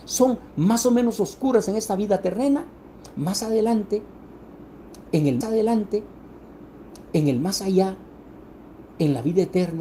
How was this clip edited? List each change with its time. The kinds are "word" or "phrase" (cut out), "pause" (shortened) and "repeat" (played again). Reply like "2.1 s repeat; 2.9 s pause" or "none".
5.4 s repeat